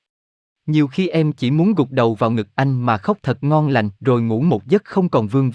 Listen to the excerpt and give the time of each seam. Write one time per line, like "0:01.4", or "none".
0:04.0